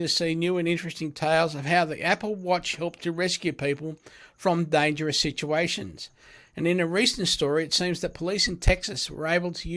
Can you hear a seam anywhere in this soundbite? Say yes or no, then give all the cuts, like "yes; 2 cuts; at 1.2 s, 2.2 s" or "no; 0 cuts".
no; 0 cuts